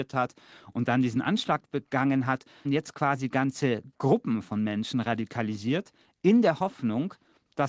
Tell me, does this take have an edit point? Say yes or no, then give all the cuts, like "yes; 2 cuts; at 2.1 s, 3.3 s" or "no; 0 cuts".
yes; 1 cut; at 2.6 s